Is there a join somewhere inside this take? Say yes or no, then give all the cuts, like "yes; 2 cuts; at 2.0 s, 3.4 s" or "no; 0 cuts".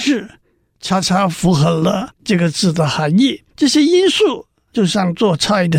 yes; 2 cuts; at 2.1 s, 3.5 s